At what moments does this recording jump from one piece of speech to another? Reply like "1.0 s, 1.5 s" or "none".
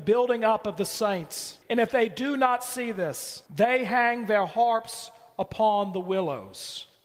1.6 s, 3.5 s

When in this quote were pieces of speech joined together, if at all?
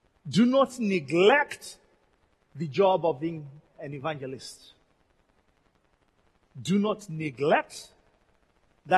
none

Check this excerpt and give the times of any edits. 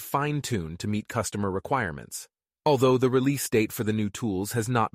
none

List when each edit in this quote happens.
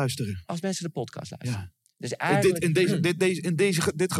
none

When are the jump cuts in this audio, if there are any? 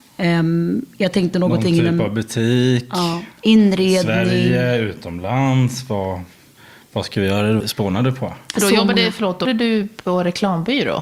7.6 s, 9.4 s

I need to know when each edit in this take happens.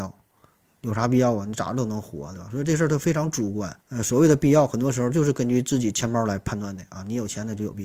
3.8 s

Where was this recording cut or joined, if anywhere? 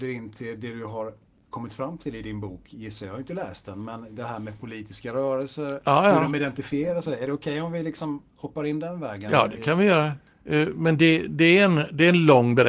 none

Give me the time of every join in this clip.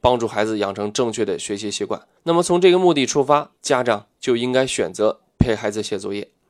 2.2 s, 3.6 s

